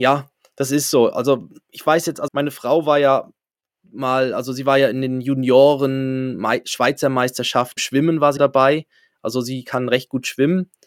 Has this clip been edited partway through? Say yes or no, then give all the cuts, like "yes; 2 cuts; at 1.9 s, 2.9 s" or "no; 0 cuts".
yes; 4 cuts; at 1.6 s, 2.3 s, 7.8 s, 8.4 s